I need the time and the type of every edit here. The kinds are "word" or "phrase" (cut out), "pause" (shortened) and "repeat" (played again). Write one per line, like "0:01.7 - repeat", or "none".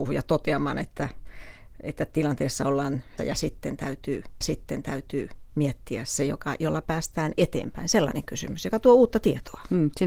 0:03.2 - phrase
0:04.4 - repeat

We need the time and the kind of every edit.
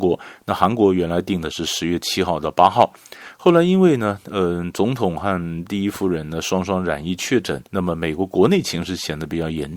0:07.7 - pause

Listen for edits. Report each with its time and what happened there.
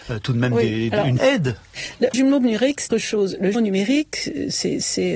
0:01.2 - word
0:02.1 - word
0:02.9 - phrase
0:03.5 - word

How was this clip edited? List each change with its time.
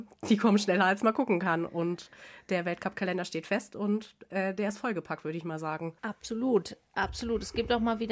0:06.0 - pause

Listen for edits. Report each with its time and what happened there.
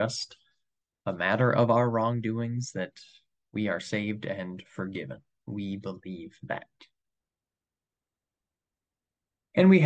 none

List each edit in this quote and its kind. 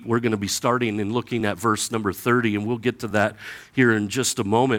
none

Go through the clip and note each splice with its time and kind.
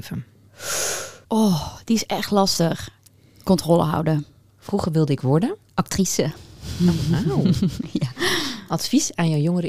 0:01.2 - pause
0:05.6 - pause

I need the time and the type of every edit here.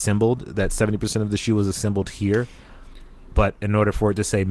none

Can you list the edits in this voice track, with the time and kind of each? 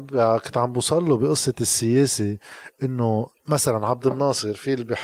0:03.4 - pause

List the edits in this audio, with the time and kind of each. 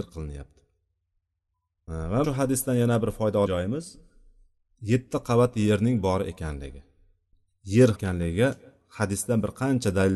0:02.2 - word
0:03.5 - word
0:07.9 - phrase

